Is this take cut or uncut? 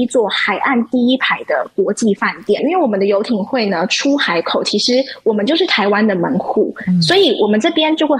uncut